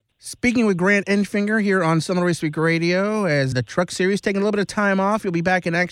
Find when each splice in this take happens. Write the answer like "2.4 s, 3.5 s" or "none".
3.5 s